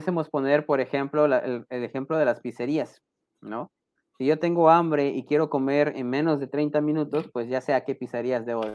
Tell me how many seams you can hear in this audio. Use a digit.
0